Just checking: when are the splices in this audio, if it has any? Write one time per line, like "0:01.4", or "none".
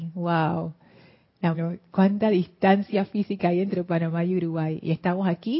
0:01.5